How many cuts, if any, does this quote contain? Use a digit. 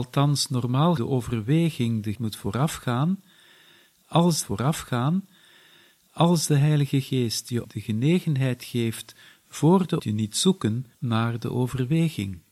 6